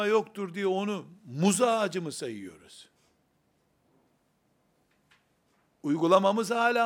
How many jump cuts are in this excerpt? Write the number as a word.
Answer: zero